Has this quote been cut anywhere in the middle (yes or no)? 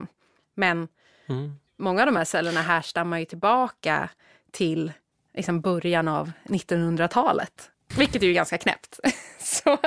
no